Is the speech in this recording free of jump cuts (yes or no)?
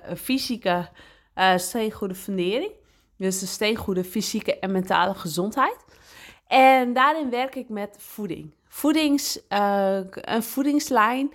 yes